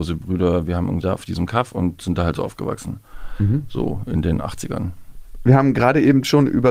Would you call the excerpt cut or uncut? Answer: cut